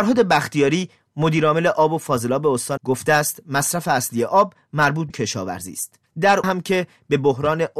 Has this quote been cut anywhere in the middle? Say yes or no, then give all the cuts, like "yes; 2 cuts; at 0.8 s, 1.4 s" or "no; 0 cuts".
yes; 3 cuts; at 2.8 s, 5.1 s, 6.4 s